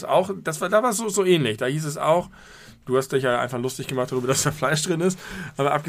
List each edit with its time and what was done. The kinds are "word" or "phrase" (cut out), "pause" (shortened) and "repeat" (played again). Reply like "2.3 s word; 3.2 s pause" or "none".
none